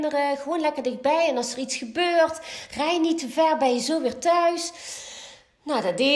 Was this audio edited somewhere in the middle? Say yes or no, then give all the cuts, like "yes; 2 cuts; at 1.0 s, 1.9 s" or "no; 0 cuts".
no; 0 cuts